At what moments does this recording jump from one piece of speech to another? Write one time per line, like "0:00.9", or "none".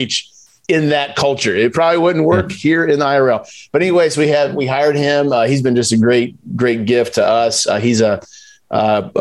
none